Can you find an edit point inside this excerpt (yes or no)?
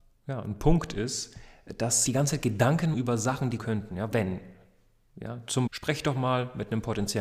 yes